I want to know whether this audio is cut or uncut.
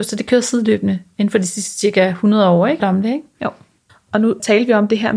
cut